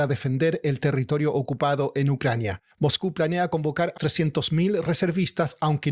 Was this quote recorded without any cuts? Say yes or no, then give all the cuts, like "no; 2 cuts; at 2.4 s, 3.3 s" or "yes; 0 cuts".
no; 2 cuts; at 2.7 s, 4.0 s